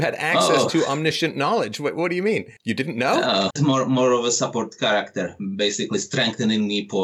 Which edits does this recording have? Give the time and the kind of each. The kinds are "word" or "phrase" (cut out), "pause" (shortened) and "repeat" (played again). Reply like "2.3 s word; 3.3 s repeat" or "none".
2.6 s pause; 3.5 s phrase